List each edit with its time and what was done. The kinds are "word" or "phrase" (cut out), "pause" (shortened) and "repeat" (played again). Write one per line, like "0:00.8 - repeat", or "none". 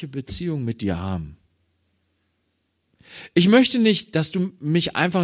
none

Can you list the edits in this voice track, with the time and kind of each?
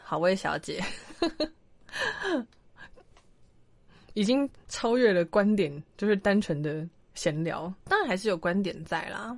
0:07.8 - pause

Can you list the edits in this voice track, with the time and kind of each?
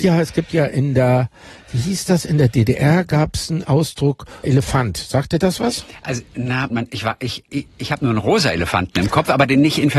0:04.4 - word
0:06.7 - word
0:07.5 - word

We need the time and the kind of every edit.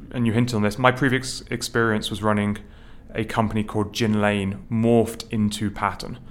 0:04.6 - word

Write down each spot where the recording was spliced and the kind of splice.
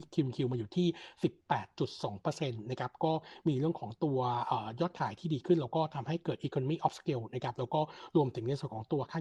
none

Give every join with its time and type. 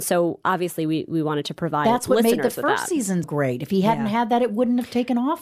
0:03.2 - word

